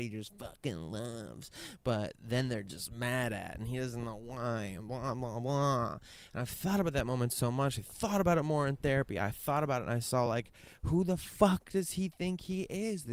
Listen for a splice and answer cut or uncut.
uncut